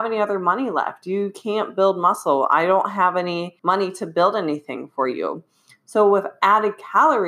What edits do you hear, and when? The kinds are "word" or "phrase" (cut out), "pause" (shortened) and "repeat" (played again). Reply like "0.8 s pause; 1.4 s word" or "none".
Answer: 3.6 s pause